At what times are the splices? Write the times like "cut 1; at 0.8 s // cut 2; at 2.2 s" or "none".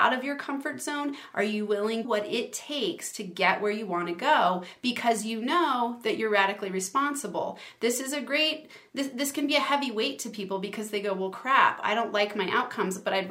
cut 1; at 2.0 s